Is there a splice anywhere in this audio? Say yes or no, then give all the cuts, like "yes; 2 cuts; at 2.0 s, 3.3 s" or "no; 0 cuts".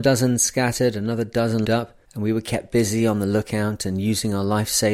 yes; 2 cuts; at 1.6 s, 2.0 s